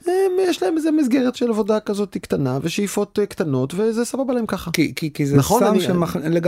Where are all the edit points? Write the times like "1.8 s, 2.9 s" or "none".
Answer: none